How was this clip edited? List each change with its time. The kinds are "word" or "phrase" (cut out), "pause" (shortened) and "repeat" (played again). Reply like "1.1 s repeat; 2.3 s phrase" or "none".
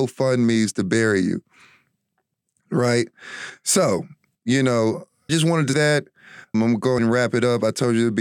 4.3 s word; 5.3 s word; 5.7 s word; 6.5 s word; 7.0 s word